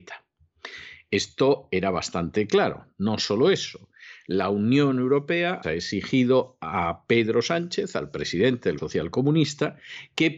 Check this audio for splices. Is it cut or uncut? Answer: cut